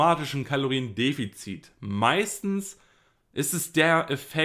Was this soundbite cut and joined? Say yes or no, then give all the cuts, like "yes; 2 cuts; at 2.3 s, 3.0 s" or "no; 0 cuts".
no; 0 cuts